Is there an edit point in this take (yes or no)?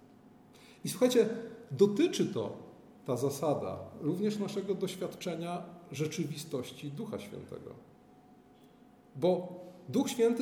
no